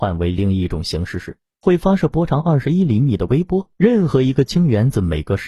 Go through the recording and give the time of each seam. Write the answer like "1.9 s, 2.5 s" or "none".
3.7 s